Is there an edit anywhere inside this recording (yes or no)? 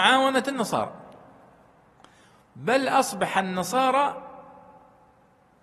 no